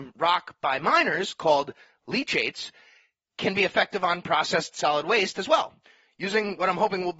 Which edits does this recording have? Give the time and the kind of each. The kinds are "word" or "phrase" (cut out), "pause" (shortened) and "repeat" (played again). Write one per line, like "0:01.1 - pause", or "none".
none